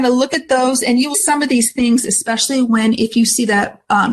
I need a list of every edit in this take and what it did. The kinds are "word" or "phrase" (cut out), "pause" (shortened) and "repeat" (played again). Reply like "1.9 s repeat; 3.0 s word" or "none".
1.1 s word